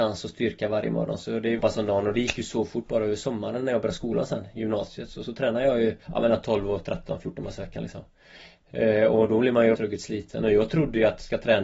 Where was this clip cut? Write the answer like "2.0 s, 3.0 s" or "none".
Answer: 1.6 s, 6.0 s, 9.7 s